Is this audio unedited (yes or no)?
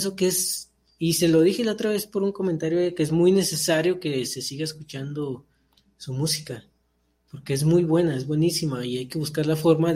yes